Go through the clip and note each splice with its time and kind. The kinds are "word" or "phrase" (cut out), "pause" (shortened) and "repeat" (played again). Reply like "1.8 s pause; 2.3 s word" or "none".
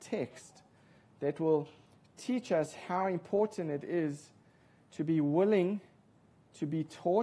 none